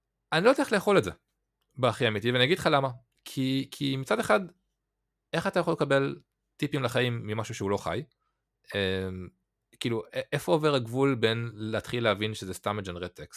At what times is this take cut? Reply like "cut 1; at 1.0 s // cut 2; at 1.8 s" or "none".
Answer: none